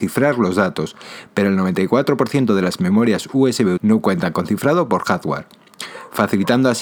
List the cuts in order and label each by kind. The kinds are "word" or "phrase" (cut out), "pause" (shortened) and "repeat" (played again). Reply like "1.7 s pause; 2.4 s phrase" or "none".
3.8 s word